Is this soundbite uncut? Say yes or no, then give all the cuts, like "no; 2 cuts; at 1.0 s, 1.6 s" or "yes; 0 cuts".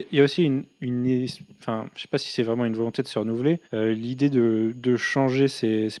no; 1 cut; at 3.6 s